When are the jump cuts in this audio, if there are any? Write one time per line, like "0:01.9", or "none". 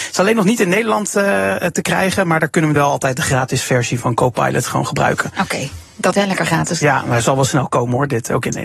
0:02.8
0:06.1